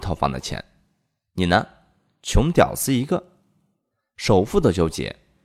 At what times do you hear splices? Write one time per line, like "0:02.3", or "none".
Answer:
none